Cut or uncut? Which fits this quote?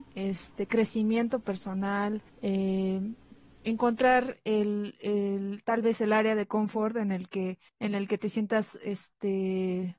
cut